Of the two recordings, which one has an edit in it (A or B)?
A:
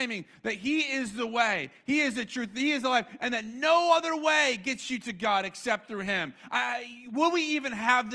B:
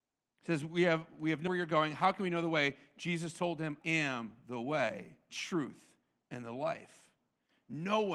B